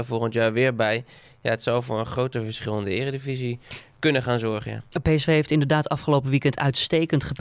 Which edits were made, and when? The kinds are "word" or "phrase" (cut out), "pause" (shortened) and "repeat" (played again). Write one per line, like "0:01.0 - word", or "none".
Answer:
none